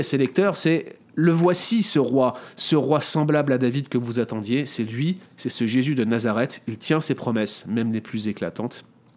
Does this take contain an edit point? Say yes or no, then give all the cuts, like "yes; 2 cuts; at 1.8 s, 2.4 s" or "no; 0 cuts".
yes; 1 cut; at 5.3 s